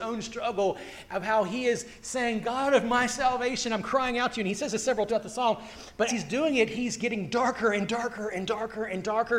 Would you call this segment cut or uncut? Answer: cut